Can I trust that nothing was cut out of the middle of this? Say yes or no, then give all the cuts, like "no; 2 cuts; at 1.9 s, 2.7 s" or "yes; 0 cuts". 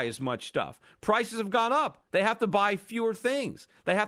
yes; 0 cuts